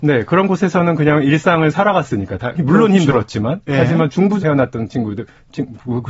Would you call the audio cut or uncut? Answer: cut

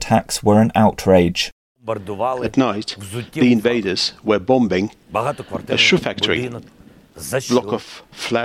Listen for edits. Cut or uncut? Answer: uncut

